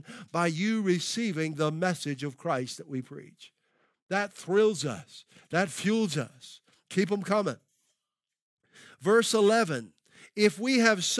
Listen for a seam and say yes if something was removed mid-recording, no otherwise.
no